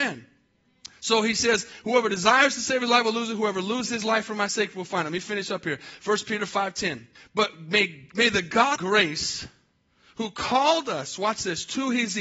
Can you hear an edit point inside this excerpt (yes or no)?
yes